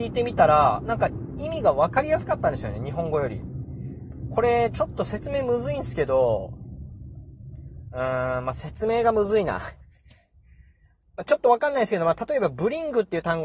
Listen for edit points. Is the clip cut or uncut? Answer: uncut